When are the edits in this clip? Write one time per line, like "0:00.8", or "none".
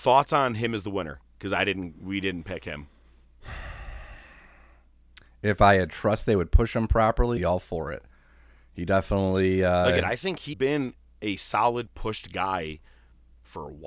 0:07.4
0:10.5

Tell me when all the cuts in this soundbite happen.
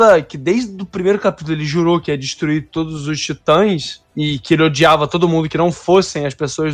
none

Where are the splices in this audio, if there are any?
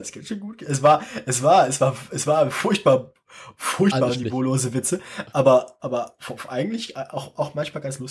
none

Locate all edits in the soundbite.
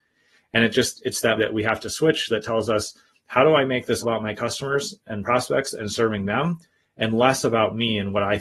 0:01.4
0:04.0

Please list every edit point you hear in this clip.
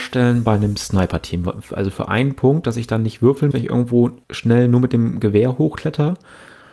0:03.5
0:04.2

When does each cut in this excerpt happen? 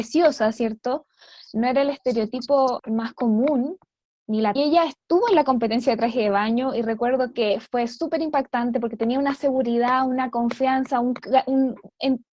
0:02.8
0:04.6

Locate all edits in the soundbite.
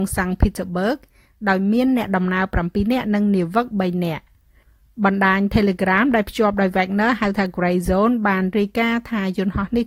none

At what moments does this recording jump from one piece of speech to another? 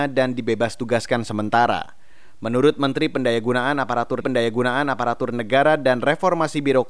0:04.2

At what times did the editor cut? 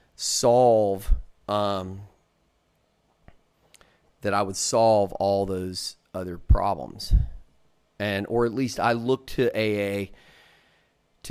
none

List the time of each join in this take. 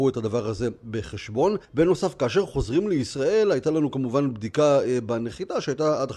0:01.6

